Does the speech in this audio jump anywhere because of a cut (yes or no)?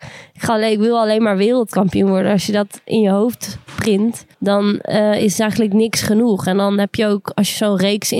yes